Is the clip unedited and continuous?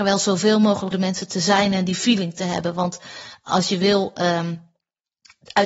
no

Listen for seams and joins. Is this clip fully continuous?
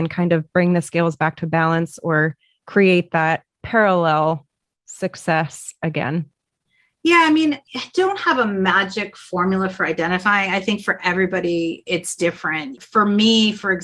yes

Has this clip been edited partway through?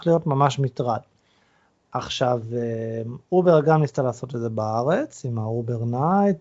no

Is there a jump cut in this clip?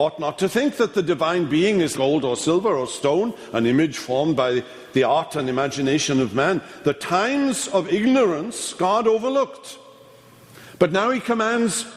yes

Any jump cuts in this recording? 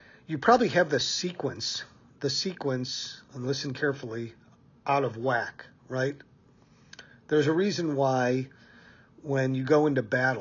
no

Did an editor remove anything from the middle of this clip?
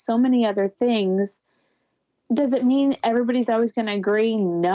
no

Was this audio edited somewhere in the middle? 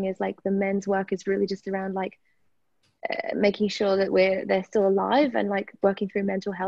no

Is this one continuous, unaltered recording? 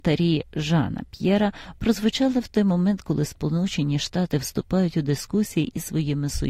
yes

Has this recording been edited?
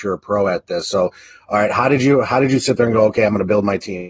no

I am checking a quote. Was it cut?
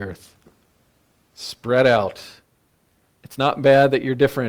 no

